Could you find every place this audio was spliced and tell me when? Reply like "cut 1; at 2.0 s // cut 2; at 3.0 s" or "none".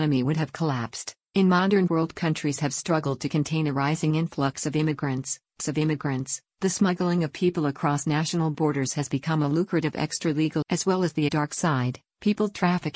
cut 1; at 1.2 s // cut 2; at 1.9 s // cut 3; at 5.6 s // cut 4; at 10.6 s // cut 5; at 11.3 s